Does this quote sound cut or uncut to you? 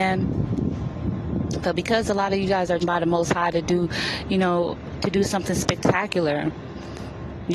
cut